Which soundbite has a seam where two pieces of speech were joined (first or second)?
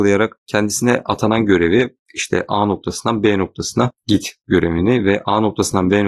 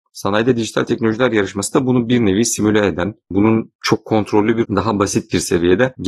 second